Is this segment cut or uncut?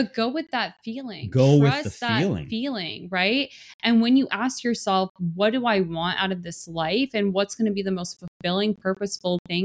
uncut